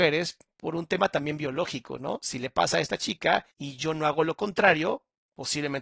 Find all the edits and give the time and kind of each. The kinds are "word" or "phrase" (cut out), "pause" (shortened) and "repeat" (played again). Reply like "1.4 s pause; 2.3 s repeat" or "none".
3.5 s pause